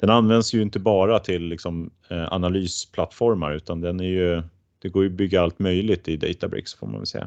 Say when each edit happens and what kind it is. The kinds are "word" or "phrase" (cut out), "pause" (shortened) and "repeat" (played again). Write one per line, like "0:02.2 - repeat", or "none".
none

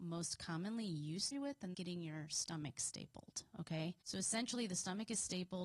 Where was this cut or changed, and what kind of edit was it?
0:01.3 - phrase
0:01.7 - word
0:04.0 - pause

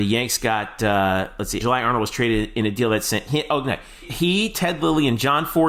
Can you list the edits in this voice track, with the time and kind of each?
0:01.6 - word
0:04.0 - word

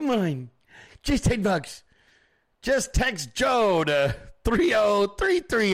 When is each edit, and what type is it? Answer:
none

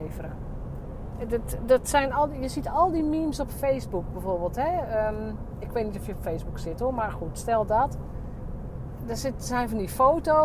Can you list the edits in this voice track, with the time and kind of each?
none

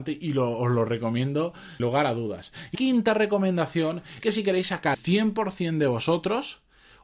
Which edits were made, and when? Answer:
0:01.8 - word
0:02.7 - word
0:04.2 - word
0:04.9 - word

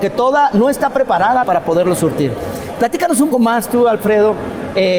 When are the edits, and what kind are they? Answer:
0:01.4 - phrase
0:03.3 - word

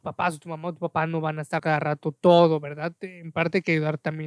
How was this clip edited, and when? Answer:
0:01.6 - phrase

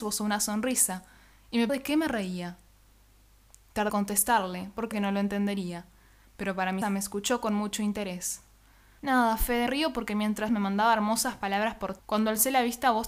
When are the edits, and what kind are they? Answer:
0:01.7 - word
0:03.9 - word
0:04.9 - word
0:06.8 - word
0:09.7 - word
0:10.5 - word
0:12.0 - word

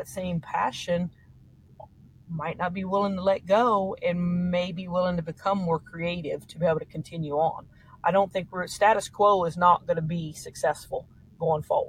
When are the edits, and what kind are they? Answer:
none

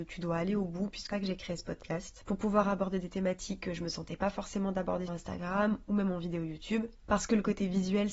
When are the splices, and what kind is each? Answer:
0:01.1 - phrase
0:05.1 - word

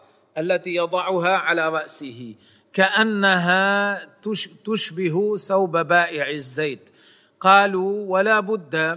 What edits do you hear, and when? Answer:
none

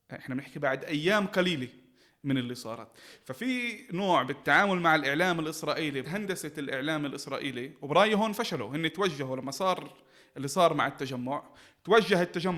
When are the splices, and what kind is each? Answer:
0:06.0 - word

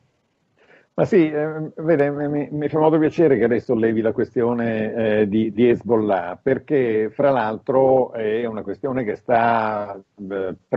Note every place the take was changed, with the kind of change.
none

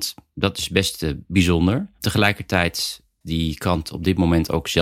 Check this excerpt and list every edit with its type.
0:03.2 - word

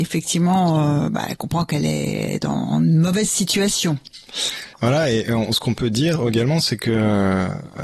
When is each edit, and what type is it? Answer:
0:04.7 - pause

